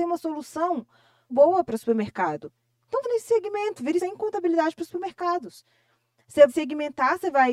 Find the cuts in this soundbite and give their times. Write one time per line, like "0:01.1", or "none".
0:01.3
0:03.0
0:04.0
0:06.5